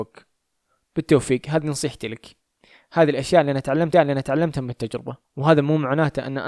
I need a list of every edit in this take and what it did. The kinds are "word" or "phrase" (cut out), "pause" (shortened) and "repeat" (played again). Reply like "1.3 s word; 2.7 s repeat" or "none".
3.9 s repeat; 5.2 s pause

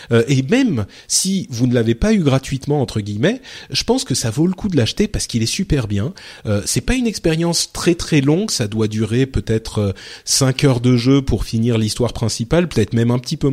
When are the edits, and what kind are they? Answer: none

